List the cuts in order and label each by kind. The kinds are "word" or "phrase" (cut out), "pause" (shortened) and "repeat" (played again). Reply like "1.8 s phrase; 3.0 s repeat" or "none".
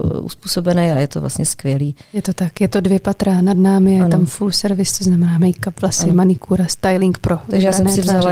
none